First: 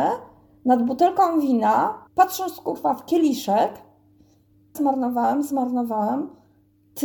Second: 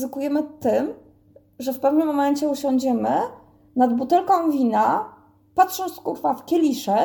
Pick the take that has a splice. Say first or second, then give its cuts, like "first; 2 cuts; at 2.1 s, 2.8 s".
first; 2 cuts; at 2.1 s, 4.7 s